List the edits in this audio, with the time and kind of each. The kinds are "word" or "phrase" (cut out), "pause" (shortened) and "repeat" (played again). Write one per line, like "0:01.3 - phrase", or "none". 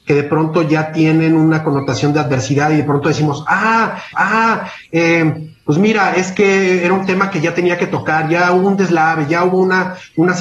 0:04.1 - repeat

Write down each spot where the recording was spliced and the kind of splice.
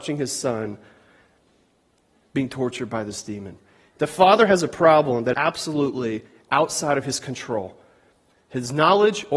0:05.3 - word

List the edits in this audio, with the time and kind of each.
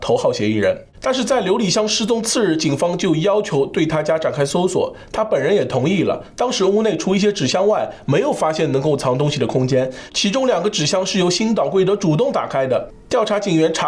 0:00.9 - pause

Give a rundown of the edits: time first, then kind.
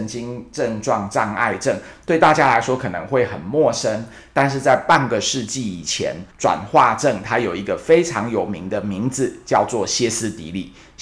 0:06.3 - pause

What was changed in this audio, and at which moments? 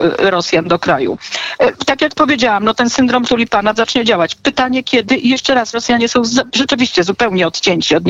0:03.3 - word
0:03.8 - word
0:05.7 - phrase

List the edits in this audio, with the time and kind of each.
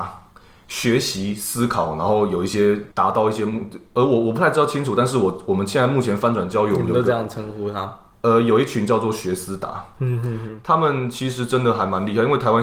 0:02.9 - pause

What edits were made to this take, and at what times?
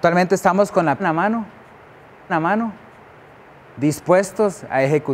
0:01.0 - word
0:02.3 - repeat

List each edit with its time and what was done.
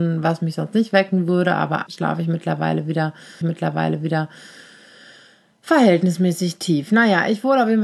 0:01.9 - word
0:03.4 - repeat

